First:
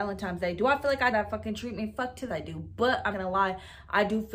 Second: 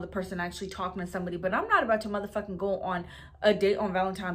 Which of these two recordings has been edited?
first; 3 cuts; at 1.1 s, 2.3 s, 3.1 s

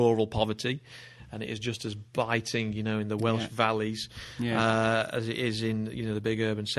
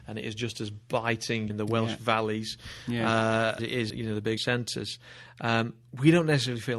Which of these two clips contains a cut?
second; 4 cuts; at 1.5 s, 3.6 s, 3.9 s, 4.4 s

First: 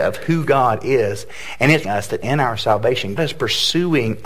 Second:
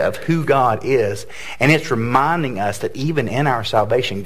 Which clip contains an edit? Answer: first; 3 cuts; at 1.8 s, 2.2 s, 3.2 s

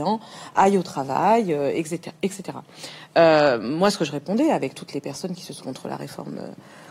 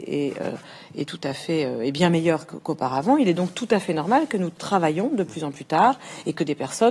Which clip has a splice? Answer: first; 1 cut; at 5.6 s

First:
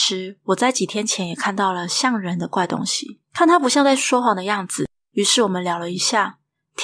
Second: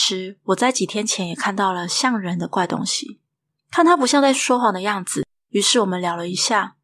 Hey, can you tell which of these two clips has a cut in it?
first; 1 cut; at 3.2 s

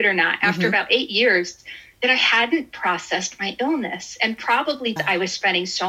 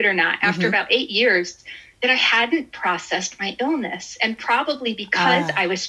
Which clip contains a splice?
first; 1 cut; at 5.0 s

